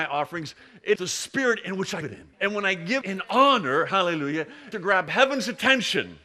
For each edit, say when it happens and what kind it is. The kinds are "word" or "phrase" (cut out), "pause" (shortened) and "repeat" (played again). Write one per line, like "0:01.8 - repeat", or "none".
0:01.0 - word
0:02.0 - word
0:02.3 - pause
0:03.0 - word
0:04.7 - phrase